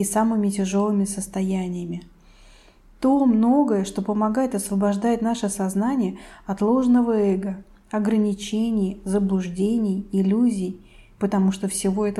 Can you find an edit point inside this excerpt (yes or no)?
no